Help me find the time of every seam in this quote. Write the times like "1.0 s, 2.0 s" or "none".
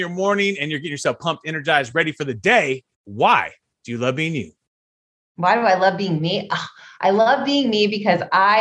none